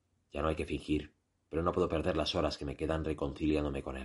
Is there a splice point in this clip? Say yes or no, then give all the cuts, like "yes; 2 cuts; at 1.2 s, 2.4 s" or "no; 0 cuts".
no; 0 cuts